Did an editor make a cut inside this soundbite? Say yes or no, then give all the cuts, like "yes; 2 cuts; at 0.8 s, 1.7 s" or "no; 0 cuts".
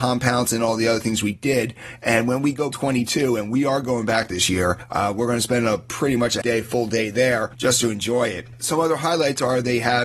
yes; 2 cuts; at 2.7 s, 6.4 s